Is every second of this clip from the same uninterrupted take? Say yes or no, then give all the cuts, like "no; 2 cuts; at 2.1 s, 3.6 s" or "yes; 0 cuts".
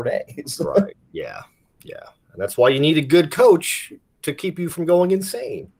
yes; 0 cuts